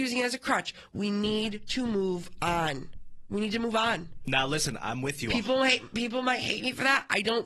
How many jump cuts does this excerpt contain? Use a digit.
0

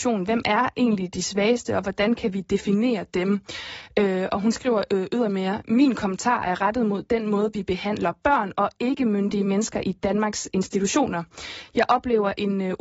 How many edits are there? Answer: 0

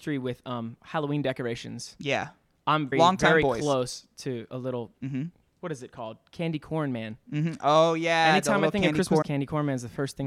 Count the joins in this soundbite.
5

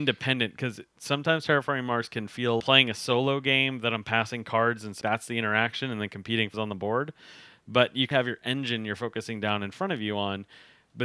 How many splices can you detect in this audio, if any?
4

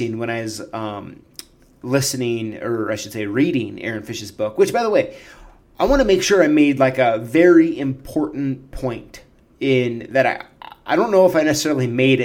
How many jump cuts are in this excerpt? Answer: 0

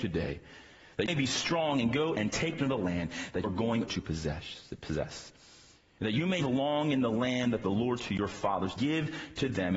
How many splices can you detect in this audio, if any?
8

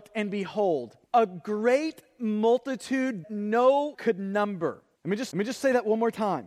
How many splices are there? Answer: 5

